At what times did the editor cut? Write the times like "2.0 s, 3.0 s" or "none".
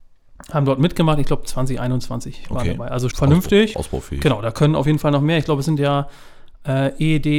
3.1 s, 3.7 s